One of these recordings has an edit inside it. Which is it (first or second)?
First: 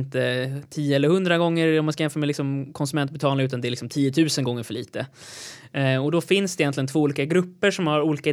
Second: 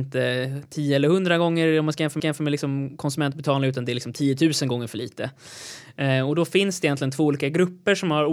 second